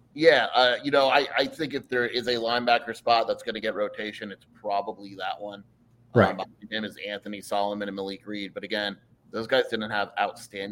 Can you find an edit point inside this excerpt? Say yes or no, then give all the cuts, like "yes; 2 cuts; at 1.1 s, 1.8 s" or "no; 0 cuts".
no; 0 cuts